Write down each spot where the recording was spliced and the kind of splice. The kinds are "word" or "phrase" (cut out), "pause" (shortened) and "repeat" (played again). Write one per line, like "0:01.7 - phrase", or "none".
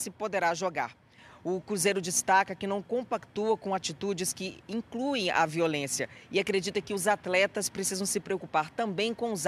none